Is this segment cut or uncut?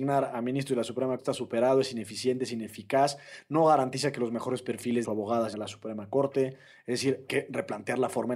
cut